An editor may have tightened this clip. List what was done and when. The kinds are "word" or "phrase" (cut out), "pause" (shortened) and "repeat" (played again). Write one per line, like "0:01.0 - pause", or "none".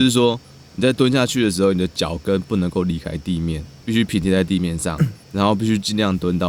0:05.2 - pause